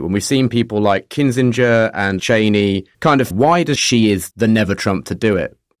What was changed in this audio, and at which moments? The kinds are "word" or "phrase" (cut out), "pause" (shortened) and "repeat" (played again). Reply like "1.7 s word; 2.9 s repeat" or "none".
2.2 s word; 2.9 s pause; 3.3 s phrase; 3.8 s phrase; 4.3 s word